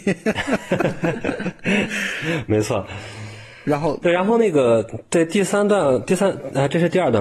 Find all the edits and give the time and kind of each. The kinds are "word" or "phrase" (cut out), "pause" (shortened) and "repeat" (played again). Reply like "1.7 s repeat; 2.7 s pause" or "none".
none